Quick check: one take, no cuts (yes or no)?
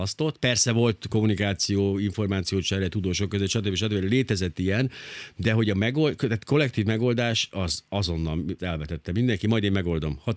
no